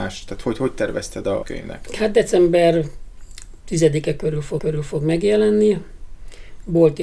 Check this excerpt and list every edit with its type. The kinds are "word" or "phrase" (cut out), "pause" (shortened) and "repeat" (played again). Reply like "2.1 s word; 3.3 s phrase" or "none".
1.4 s phrase; 4.6 s repeat

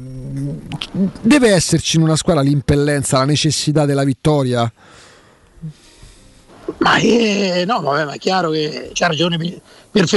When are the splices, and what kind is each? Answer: none

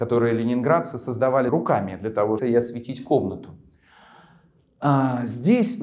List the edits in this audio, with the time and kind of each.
1.5 s word; 2.4 s phrase

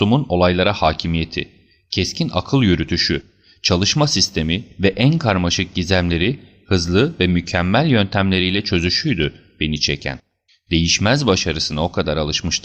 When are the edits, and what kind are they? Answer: 10.5 s pause

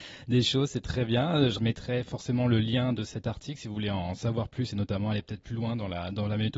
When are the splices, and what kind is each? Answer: 1.6 s phrase

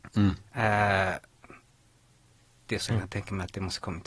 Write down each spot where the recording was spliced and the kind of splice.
2.9 s word

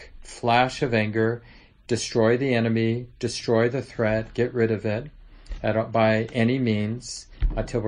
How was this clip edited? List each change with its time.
none

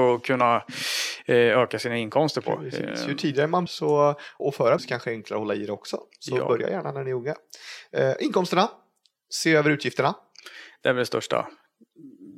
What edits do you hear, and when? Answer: 3.7 s word; 4.4 s word; 4.8 s word

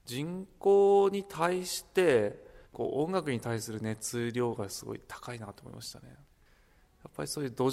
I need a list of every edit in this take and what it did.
2.7 s pause

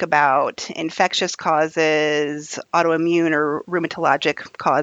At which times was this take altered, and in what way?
none

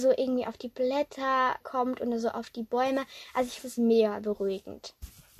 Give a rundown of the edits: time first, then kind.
1.6 s word; 3.6 s word

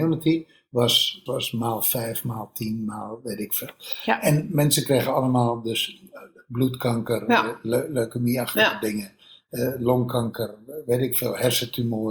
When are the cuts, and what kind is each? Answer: 1.3 s word

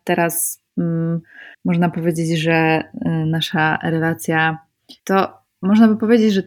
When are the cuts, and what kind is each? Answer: 1.5 s pause; 5.0 s pause

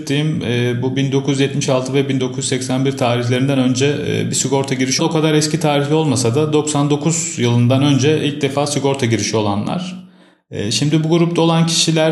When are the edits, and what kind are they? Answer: 5.0 s phrase

